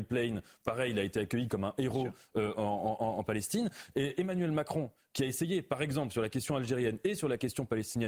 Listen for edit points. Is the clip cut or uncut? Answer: uncut